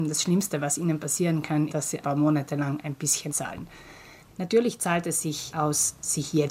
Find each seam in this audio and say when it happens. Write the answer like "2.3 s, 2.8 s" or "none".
1.7 s, 2.0 s, 3.3 s